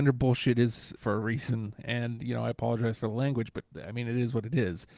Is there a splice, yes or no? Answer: yes